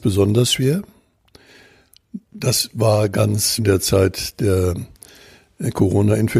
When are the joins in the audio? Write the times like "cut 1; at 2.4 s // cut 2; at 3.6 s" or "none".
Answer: cut 1; at 2.2 s // cut 2; at 3.6 s